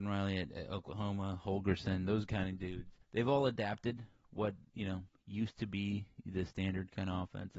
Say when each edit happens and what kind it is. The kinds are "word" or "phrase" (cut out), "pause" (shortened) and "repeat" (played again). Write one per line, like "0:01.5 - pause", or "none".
0:03.0 - pause